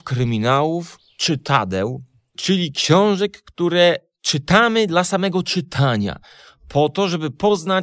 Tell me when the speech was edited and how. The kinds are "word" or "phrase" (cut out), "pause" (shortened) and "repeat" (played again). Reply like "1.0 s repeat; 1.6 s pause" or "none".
none